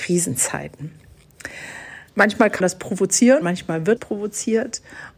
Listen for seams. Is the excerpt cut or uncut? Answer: cut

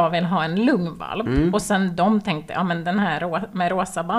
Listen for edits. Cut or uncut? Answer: uncut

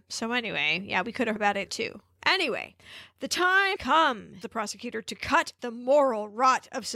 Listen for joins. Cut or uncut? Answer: cut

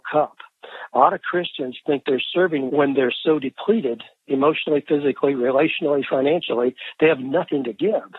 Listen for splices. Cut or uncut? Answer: cut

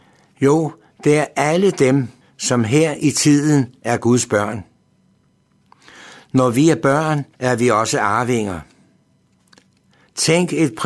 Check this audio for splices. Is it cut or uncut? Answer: cut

